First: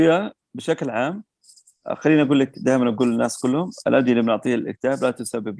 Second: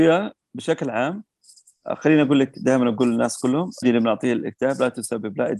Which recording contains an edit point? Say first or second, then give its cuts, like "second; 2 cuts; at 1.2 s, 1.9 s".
second; 1 cut; at 3.8 s